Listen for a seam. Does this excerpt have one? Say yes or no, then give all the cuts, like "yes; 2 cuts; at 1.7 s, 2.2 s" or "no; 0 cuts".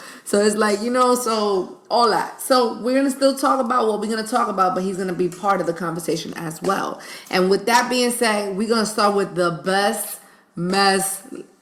no; 0 cuts